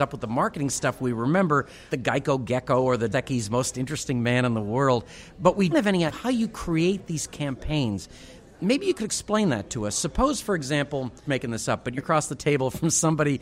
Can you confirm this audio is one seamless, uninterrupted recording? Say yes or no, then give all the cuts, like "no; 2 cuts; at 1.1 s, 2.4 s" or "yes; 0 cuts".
no; 6 cuts; at 1.9 s, 3.1 s, 5.7 s, 6.1 s, 11.2 s, 12.0 s